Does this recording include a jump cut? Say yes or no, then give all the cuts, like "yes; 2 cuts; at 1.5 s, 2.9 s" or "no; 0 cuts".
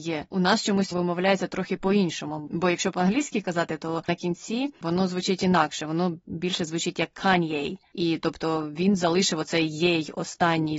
yes; 1 cut; at 4.1 s